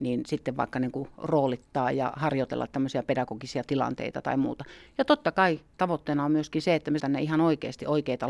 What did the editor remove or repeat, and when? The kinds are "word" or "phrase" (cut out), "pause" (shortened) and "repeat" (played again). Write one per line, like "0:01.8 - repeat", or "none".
0:07.0 - word